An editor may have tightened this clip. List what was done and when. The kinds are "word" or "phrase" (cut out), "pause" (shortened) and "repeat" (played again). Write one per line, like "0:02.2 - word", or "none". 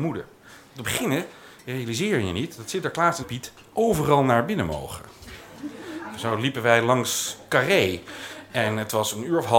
none